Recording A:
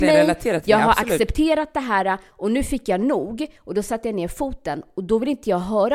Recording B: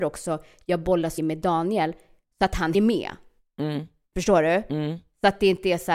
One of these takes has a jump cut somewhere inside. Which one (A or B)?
B